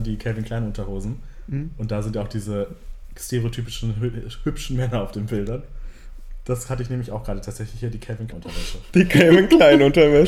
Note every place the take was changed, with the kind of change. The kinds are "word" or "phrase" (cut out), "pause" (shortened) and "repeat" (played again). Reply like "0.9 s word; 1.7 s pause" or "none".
8.3 s word

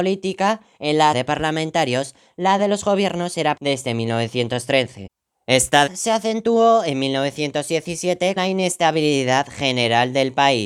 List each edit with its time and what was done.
1.1 s word; 2.6 s word; 3.6 s word; 5.9 s word; 8.4 s word

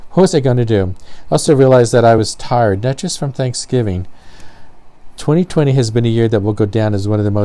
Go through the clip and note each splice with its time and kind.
none

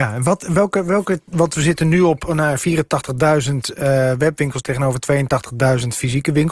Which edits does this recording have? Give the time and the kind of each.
none

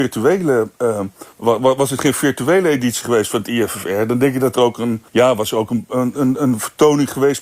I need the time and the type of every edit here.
1.3 s pause; 5.1 s pause

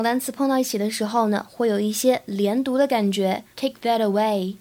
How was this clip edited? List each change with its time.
3.5 s pause

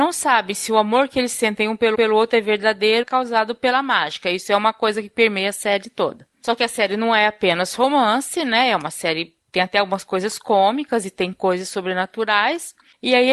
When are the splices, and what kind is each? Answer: 1.9 s repeat; 3.0 s phrase

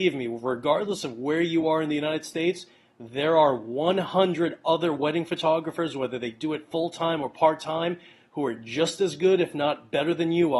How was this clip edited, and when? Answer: none

